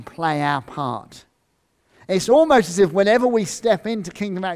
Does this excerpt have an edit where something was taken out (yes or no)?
no